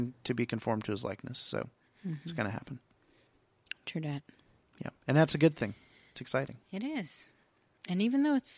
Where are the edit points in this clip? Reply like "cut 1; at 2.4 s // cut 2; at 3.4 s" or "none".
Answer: none